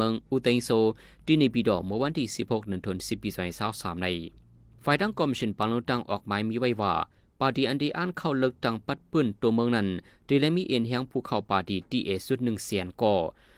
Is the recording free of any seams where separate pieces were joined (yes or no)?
yes